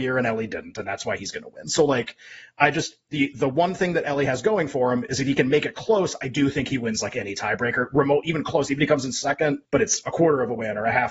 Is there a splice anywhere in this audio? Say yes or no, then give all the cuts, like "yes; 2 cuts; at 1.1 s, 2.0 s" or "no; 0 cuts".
yes; 1 cut; at 9.7 s